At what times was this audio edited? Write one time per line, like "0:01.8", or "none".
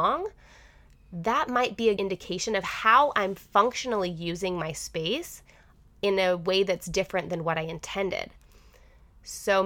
0:02.0